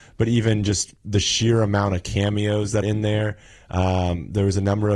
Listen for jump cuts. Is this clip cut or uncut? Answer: cut